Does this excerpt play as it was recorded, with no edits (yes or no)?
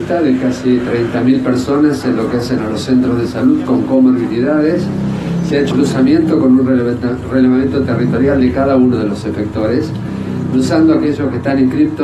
no